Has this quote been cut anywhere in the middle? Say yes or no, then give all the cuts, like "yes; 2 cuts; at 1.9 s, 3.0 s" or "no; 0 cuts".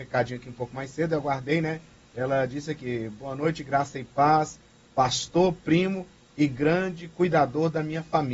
no; 0 cuts